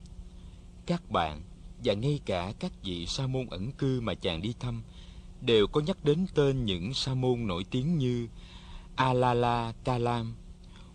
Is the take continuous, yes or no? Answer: yes